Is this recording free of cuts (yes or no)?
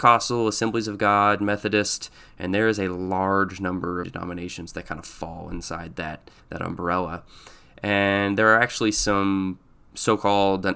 no